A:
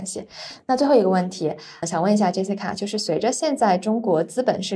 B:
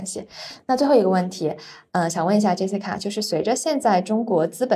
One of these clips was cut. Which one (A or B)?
A